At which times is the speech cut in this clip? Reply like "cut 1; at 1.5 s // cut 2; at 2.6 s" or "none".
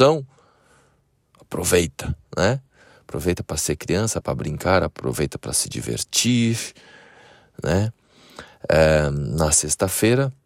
cut 1; at 4.2 s